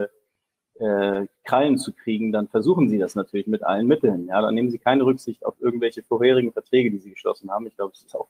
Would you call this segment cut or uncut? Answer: uncut